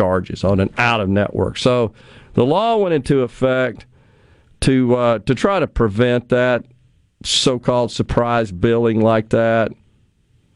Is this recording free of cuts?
yes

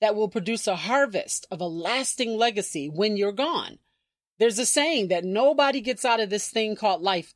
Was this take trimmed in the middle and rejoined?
no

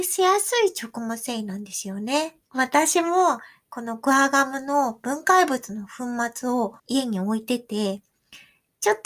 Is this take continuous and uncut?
no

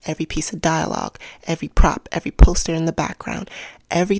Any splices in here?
no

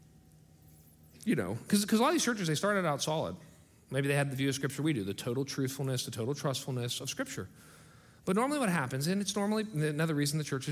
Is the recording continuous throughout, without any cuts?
yes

